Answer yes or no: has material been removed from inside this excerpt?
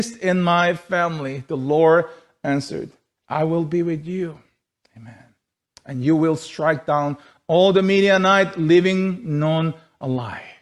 no